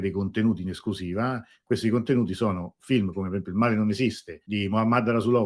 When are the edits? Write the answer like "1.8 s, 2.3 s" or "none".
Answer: 4.4 s